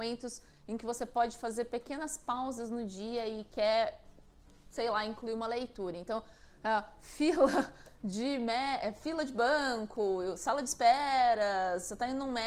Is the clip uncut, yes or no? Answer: yes